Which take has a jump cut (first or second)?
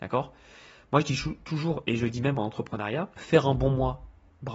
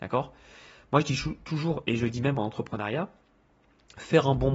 first